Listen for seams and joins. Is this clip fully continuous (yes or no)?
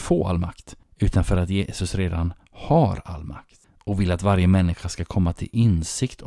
yes